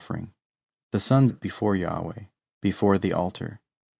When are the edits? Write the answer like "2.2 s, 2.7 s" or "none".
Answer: 1.3 s